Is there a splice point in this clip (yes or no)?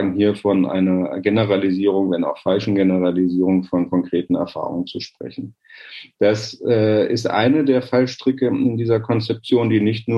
no